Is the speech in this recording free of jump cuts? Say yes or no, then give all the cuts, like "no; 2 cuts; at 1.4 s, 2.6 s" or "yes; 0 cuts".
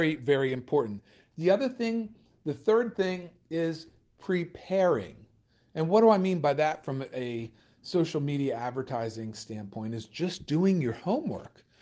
yes; 0 cuts